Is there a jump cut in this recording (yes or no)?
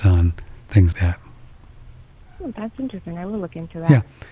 yes